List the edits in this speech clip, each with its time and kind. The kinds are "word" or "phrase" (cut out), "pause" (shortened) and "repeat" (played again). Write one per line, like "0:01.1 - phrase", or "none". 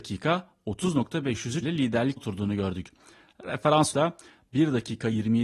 0:01.6 - word
0:02.2 - word
0:03.9 - word